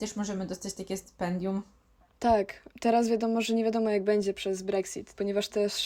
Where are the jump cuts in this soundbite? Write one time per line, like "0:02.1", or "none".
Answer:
none